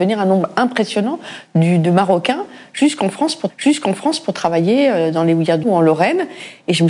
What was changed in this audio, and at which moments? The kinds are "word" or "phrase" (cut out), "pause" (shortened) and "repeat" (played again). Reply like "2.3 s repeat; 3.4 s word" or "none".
3.5 s repeat; 5.6 s word